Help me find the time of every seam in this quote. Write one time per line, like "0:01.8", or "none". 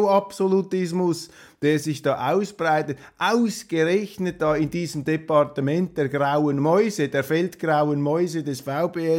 none